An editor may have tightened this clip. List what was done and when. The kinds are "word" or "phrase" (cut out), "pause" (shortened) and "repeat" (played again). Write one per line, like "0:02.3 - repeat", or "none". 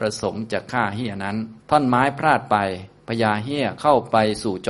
0:01.6 - pause